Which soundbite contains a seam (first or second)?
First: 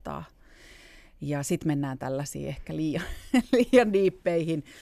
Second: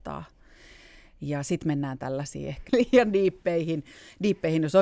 second